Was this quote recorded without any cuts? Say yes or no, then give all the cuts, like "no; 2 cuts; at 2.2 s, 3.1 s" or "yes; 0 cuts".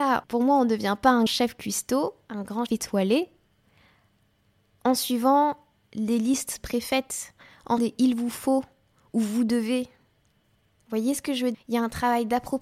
no; 4 cuts; at 1.3 s, 2.7 s, 7.8 s, 11.5 s